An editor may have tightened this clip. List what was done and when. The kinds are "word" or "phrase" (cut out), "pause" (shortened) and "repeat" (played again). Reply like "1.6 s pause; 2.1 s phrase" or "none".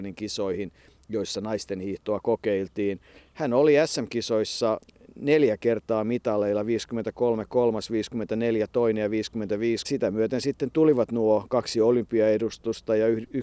9.8 s phrase